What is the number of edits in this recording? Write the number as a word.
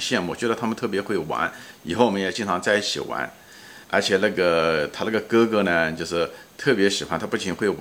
one